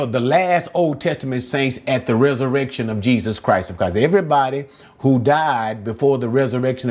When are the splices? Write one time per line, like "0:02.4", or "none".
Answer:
none